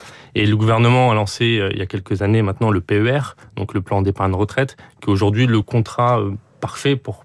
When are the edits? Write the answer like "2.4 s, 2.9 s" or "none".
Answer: none